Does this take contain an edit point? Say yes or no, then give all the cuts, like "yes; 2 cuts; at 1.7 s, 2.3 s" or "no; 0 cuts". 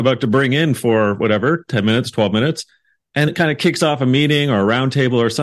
yes; 1 cut; at 3.3 s